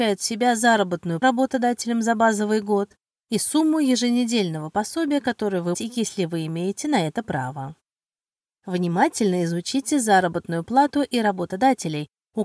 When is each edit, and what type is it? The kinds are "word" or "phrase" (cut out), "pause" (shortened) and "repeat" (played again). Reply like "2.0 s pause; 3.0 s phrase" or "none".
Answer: 1.2 s phrase; 5.7 s phrase